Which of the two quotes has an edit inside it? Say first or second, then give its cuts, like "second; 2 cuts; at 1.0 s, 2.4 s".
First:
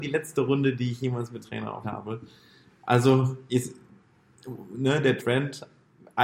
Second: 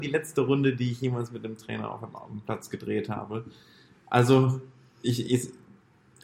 first; 4 cuts; at 1.4 s, 1.8 s, 3.5 s, 5.2 s